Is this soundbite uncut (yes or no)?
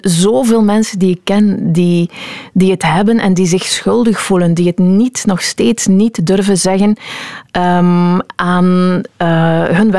yes